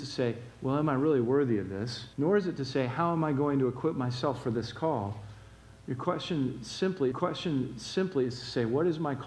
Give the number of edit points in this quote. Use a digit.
2